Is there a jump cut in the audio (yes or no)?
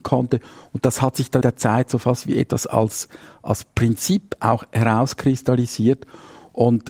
yes